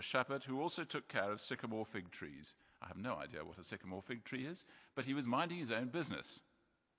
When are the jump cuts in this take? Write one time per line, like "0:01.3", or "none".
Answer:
none